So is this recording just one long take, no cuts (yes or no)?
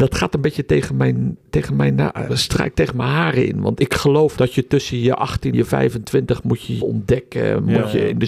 no